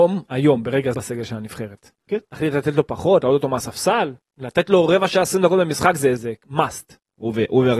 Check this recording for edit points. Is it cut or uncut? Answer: cut